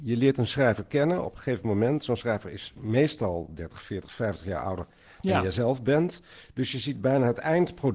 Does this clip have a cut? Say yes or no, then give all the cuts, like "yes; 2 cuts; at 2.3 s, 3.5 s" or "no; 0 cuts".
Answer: no; 0 cuts